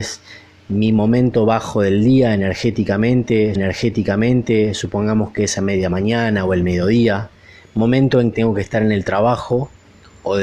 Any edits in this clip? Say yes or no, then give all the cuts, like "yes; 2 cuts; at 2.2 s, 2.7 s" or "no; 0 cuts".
yes; 2 cuts; at 3.6 s, 8.3 s